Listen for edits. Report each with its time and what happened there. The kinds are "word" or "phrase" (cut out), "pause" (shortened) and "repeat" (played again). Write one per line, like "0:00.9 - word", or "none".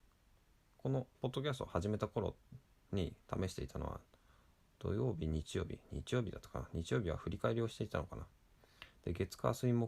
0:01.1 - pause